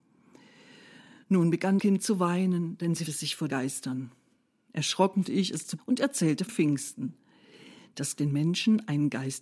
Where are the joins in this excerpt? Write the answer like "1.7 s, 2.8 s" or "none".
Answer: 1.8 s, 3.1 s, 3.5 s, 5.2 s, 5.8 s, 6.5 s, 8.2 s